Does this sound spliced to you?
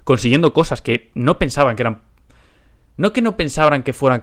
no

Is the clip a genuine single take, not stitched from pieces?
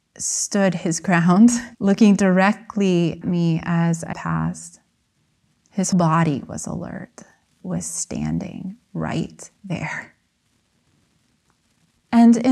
no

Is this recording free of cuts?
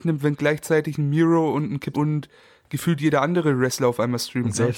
no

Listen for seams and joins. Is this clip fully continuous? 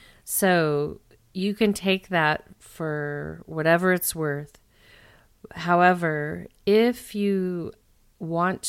yes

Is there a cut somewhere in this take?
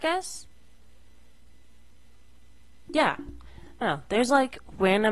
yes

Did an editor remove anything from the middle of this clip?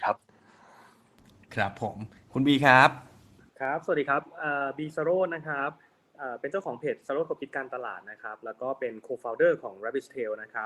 no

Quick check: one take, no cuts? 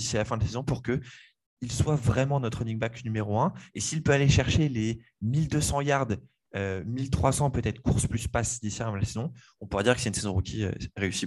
yes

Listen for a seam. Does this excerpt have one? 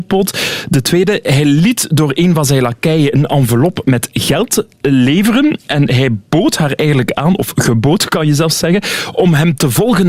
no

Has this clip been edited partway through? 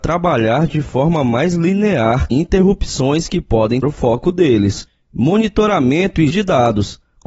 yes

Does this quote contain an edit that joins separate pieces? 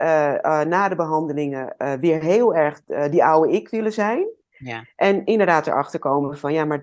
no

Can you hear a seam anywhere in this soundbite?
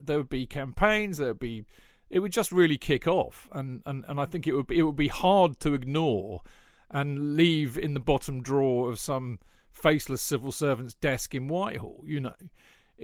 no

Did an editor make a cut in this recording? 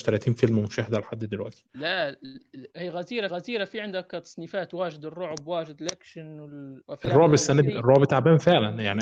yes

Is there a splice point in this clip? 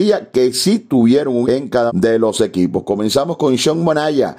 yes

